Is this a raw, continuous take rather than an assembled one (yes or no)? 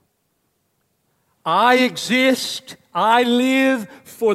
yes